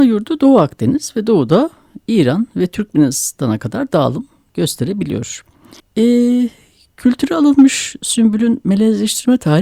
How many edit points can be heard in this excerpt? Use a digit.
1